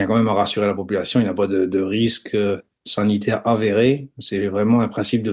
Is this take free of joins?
yes; 0 cuts

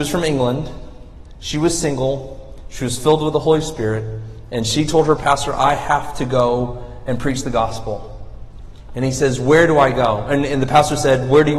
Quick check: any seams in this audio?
yes; 1 cut; at 5.2 s

